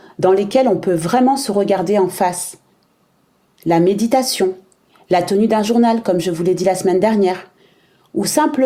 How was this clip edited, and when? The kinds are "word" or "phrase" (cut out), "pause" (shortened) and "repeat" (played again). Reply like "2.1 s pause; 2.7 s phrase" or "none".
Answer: none